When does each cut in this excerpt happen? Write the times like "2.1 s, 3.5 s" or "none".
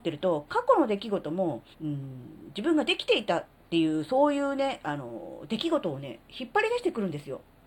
1.7 s